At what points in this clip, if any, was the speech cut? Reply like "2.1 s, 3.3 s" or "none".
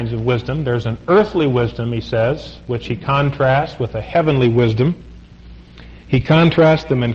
6.0 s